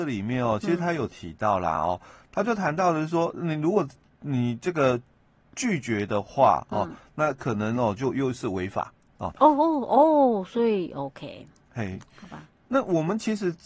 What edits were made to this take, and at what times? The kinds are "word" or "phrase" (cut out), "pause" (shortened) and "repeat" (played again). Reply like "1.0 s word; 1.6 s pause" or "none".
none